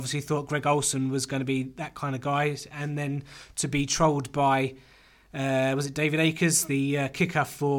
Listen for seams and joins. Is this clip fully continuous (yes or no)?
yes